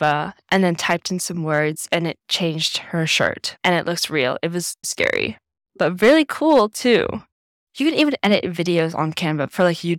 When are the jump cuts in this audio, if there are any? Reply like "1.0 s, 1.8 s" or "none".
4.8 s